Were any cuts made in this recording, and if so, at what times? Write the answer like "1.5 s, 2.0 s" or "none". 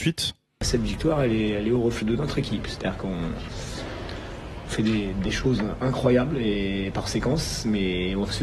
2.0 s